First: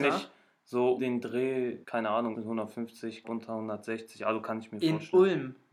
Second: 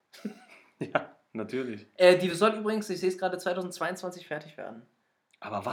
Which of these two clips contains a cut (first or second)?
first